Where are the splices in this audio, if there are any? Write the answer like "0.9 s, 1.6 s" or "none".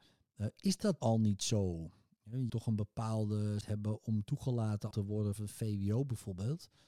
1.0 s, 2.5 s, 3.6 s, 4.9 s, 5.4 s